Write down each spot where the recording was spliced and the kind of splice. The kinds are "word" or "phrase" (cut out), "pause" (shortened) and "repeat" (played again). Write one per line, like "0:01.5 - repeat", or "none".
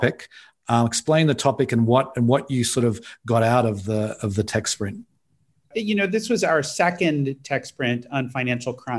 none